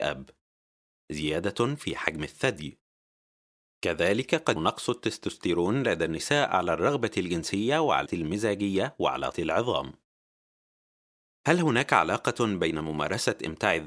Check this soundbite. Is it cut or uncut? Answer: cut